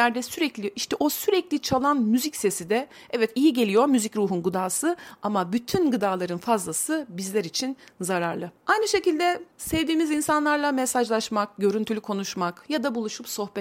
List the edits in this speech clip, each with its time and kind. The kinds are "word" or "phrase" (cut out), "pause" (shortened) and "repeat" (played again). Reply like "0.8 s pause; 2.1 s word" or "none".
8.6 s pause; 9.5 s pause